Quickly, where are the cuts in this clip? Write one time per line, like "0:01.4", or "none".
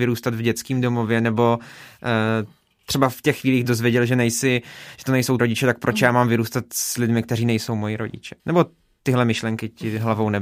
0:03.6
0:05.4
0:08.4